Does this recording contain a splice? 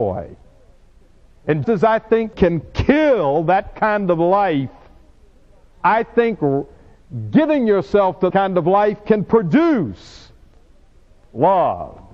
yes; 3 cuts; at 1.6 s, 2.3 s, 8.3 s

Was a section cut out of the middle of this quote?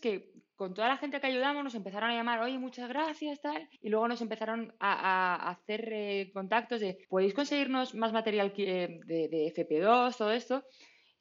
yes; 2 cuts; at 3.8 s, 7.0 s

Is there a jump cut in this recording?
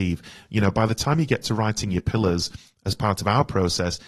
no; 0 cuts

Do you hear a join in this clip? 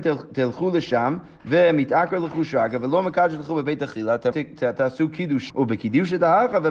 yes; 2 cuts; at 4.3 s, 5.5 s

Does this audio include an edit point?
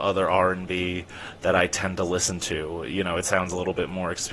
no; 0 cuts

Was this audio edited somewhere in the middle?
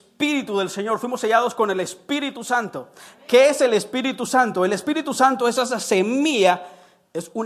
no; 0 cuts

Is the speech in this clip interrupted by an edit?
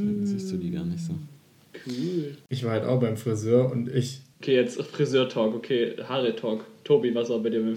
no; 0 cuts

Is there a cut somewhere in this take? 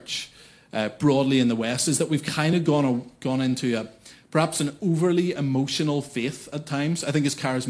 no; 0 cuts

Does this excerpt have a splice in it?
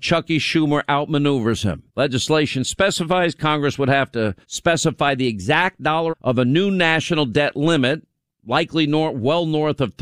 yes; 3 cuts; at 1.9 s, 4.4 s, 6.1 s

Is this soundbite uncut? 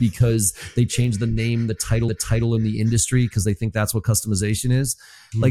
no; 1 cut; at 2.1 s

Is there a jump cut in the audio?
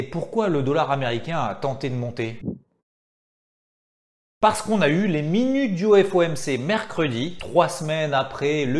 yes; 1 cut; at 7.4 s

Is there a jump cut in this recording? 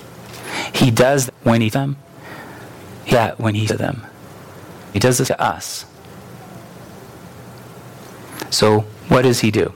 yes; 6 cuts; at 1.3 s, 1.7 s, 3.1 s, 3.7 s, 4.9 s, 5.3 s

